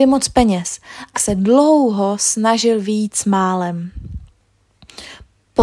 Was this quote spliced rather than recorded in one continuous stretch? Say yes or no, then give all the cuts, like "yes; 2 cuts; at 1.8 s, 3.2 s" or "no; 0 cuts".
yes; 1 cut; at 1.1 s